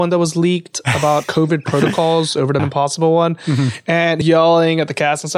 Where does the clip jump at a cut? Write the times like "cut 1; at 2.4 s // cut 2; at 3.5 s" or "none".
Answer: cut 1; at 1.2 s // cut 2; at 2.6 s // cut 3; at 4.2 s